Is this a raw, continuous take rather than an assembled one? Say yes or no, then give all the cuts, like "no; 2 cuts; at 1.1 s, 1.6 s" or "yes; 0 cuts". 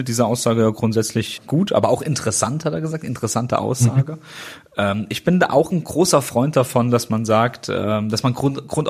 no; 1 cut; at 1.4 s